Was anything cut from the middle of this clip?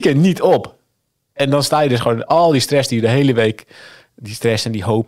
no; 0 cuts

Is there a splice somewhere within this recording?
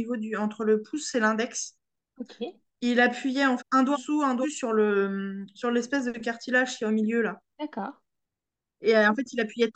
yes; 3 cuts; at 3.6 s, 3.9 s, 4.4 s

